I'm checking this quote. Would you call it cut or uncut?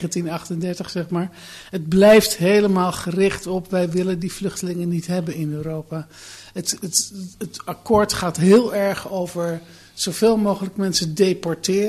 uncut